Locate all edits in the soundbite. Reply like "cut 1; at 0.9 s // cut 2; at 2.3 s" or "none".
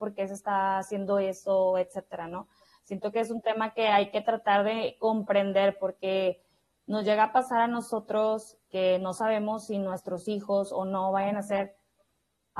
none